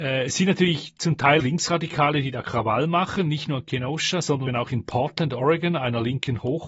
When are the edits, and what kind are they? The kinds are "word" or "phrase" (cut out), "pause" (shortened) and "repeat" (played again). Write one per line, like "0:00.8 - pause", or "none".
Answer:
0:01.4 - word
0:04.5 - word